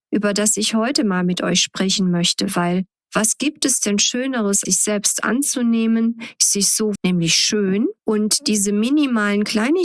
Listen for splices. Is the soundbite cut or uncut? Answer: cut